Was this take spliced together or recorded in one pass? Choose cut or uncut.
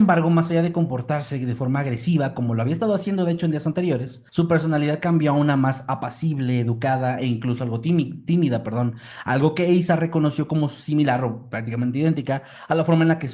cut